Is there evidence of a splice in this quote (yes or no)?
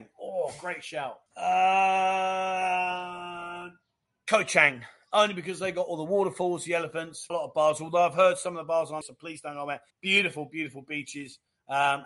yes